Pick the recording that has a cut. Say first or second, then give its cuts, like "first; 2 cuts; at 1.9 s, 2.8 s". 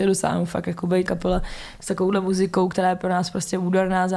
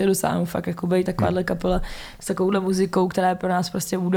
first; 1 cut; at 1.1 s